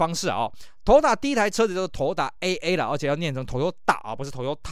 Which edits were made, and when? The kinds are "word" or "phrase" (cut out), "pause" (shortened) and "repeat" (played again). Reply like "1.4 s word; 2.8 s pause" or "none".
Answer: none